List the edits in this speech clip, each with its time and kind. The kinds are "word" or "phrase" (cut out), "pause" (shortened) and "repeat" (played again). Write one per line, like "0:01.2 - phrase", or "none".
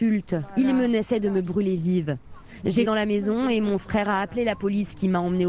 0:02.8 - phrase